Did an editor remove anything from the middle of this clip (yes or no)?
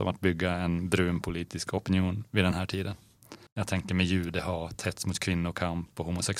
yes